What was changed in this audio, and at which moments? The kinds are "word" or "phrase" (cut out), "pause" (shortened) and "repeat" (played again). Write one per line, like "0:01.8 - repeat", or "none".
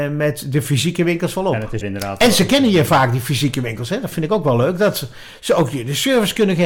0:01.8 - word